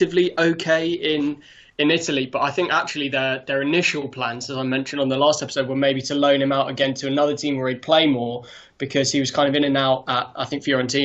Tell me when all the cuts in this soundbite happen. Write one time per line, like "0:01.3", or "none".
none